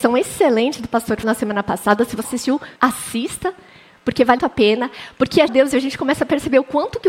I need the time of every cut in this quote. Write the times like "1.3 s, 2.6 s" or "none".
1.2 s, 2.2 s, 2.8 s, 4.4 s, 5.5 s